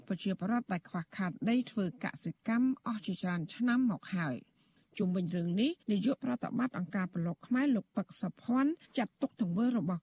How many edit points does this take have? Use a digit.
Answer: 2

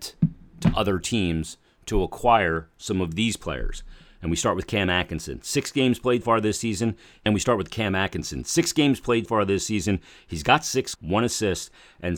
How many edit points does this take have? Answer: 3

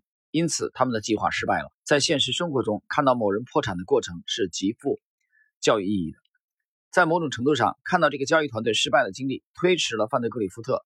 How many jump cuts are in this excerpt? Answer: 1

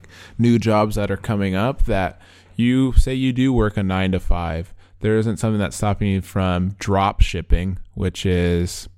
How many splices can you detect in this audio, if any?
0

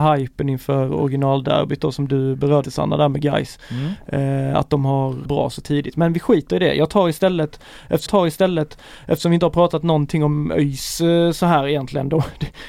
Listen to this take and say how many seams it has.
3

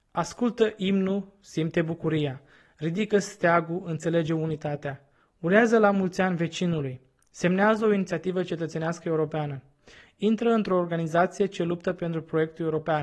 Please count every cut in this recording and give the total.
0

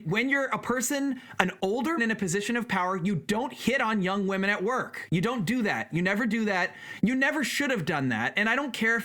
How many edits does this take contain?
1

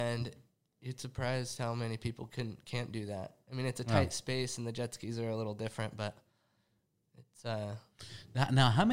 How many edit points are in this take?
0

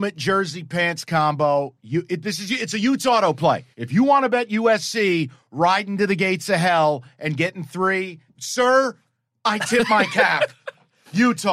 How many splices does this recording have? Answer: 2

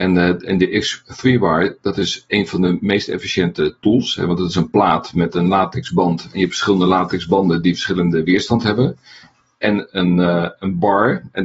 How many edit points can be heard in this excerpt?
0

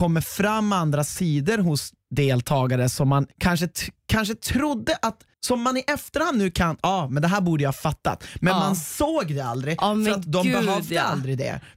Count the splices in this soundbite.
2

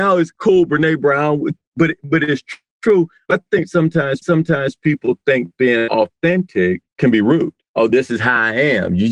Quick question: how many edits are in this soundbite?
2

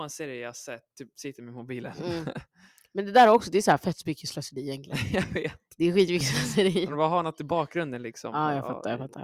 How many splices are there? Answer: 0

